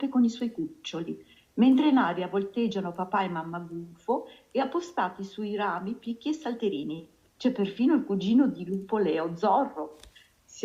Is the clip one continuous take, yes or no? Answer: yes